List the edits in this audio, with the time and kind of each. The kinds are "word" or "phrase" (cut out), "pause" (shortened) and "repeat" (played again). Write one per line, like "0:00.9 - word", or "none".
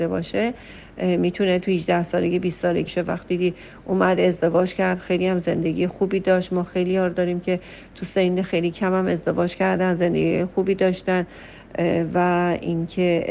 0:02.9 - word

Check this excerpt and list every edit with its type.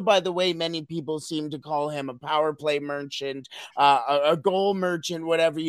none

